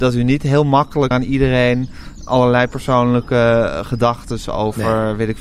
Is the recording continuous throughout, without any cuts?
no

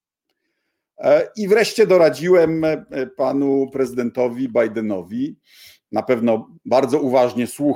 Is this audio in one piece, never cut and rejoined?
yes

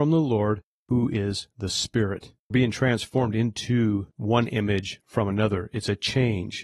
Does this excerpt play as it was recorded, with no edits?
no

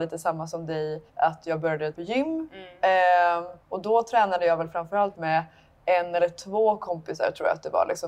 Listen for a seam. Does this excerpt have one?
yes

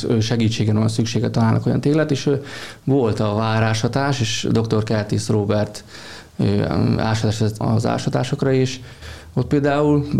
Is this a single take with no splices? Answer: no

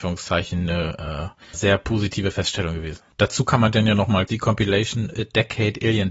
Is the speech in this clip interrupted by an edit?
yes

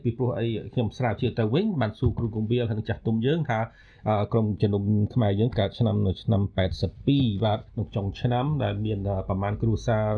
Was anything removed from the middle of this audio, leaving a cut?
yes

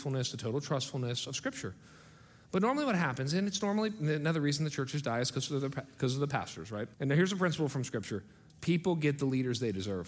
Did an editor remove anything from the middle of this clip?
yes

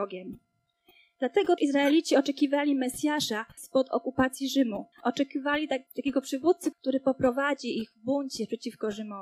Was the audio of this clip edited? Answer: yes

